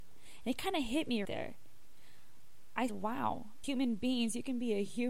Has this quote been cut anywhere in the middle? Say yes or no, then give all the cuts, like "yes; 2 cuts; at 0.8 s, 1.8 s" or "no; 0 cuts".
yes; 3 cuts; at 1.2 s, 2.9 s, 3.6 s